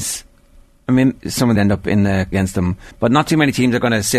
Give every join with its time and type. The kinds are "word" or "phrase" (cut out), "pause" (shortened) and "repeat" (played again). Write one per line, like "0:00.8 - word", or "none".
0:01.2 - word
0:01.6 - phrase
0:02.3 - phrase
0:02.9 - pause